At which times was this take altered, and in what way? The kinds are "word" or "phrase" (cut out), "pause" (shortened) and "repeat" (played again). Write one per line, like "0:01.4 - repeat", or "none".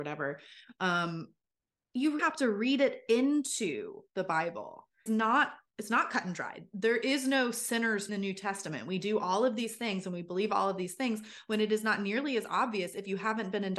0:02.2 - word
0:04.1 - pause
0:05.1 - word
0:08.1 - phrase